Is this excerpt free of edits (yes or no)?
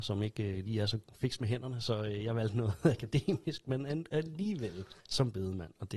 no